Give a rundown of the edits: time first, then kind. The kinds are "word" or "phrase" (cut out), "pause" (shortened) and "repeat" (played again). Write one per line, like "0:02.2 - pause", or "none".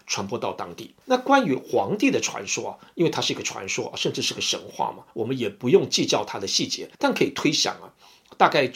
0:01.0 - pause
0:05.1 - pause
0:06.9 - pause